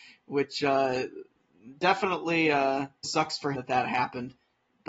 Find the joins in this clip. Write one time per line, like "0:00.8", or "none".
0:03.0
0:03.5